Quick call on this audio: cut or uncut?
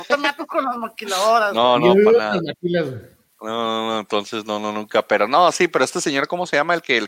uncut